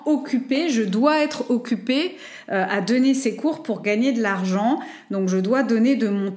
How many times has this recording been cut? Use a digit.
0